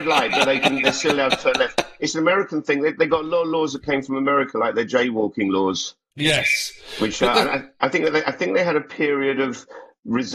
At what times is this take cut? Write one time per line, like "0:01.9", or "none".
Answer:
none